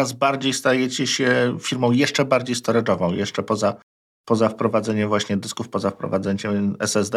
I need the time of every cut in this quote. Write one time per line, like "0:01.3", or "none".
none